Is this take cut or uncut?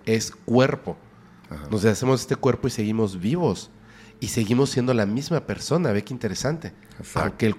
uncut